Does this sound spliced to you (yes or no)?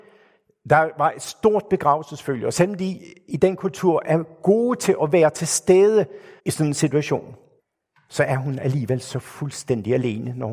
yes